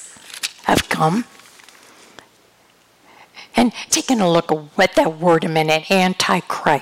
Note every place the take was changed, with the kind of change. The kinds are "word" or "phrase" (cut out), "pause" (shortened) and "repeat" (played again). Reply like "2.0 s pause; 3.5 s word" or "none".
3.9 s word